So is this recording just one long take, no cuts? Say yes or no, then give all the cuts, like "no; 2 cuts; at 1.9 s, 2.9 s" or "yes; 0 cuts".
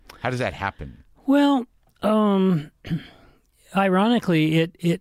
no; 1 cut; at 1.8 s